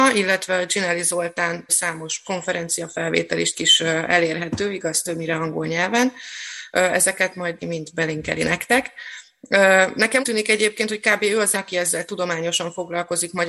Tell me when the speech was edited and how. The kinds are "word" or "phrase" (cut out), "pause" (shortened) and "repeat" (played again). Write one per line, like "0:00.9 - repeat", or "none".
0:01.7 - word
0:02.2 - word
0:03.5 - word
0:07.6 - word
0:10.2 - word
0:11.5 - word

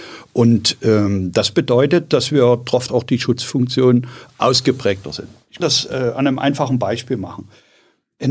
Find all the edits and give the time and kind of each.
0:02.9 - phrase
0:05.6 - word

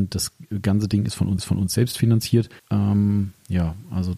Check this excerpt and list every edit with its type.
0:01.4 - repeat
0:02.6 - pause

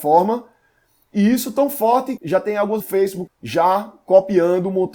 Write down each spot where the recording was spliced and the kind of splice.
0:02.2 - word
0:02.8 - phrase
0:03.3 - word

